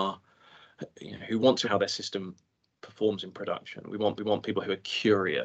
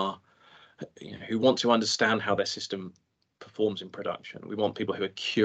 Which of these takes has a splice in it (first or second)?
first